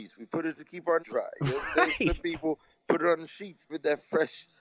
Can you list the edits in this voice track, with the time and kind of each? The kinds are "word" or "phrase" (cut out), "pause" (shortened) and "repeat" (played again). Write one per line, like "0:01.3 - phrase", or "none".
0:01.0 - word
0:03.7 - word